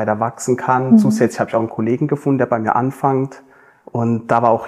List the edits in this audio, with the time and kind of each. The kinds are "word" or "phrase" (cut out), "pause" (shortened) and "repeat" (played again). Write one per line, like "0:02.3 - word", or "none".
none